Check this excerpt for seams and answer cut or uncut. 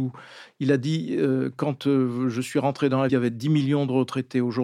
cut